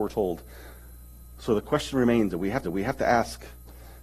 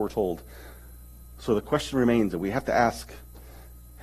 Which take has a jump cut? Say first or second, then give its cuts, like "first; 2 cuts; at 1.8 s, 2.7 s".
first; 1 cut; at 2.6 s